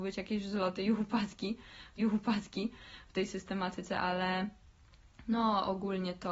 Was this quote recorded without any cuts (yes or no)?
no